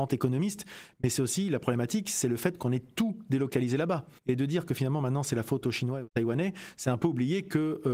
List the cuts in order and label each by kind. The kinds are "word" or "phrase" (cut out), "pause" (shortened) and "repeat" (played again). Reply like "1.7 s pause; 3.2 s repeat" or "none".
4.2 s pause